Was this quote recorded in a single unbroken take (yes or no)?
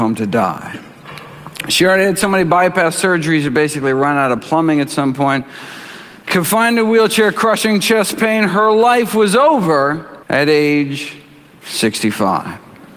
no